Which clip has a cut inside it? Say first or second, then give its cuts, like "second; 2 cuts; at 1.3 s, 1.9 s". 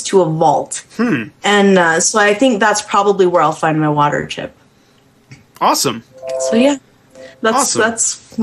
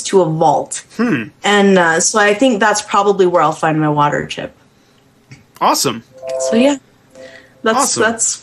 first; 1 cut; at 7.3 s